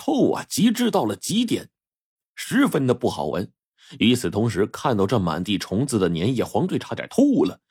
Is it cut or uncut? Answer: uncut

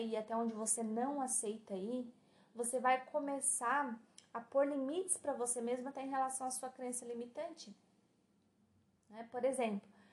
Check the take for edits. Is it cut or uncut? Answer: uncut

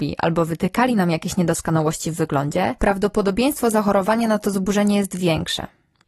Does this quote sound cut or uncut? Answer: uncut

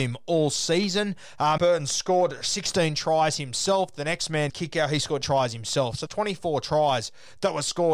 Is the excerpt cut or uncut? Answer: cut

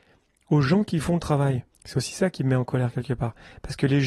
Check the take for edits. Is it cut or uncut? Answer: cut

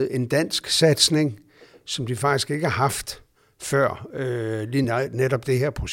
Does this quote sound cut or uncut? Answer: uncut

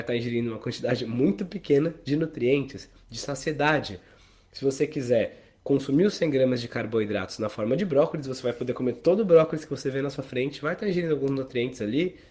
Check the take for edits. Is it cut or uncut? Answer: uncut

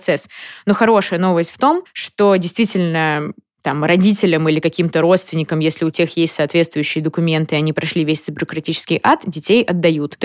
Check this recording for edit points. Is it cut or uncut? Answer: uncut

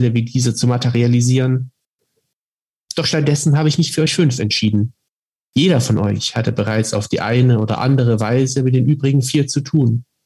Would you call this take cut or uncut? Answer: uncut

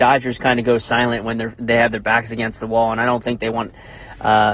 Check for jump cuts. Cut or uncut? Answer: uncut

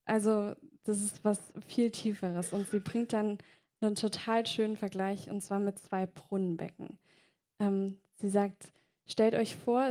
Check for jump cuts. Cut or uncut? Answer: uncut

